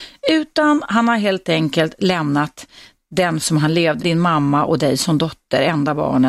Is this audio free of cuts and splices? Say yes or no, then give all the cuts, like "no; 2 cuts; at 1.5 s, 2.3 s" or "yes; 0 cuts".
no; 2 cuts; at 3.4 s, 4.0 s